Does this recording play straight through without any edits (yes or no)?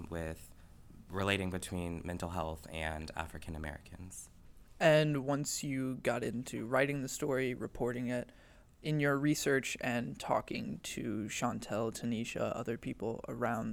yes